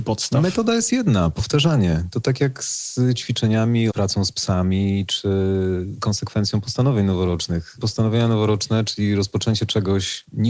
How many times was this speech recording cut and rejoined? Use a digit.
1